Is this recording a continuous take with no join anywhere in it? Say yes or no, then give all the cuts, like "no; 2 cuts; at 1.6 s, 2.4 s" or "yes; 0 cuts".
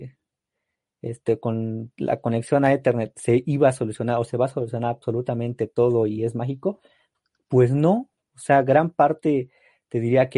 yes; 0 cuts